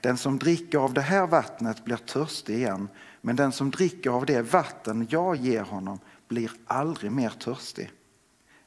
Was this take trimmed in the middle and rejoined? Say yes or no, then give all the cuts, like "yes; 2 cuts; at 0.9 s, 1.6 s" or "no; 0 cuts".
no; 0 cuts